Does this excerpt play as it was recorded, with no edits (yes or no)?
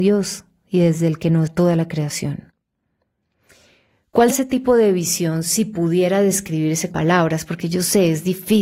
no